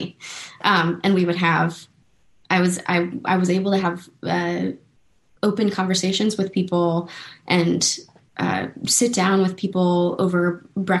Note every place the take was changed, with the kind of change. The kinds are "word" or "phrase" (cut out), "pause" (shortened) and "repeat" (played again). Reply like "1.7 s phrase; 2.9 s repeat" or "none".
none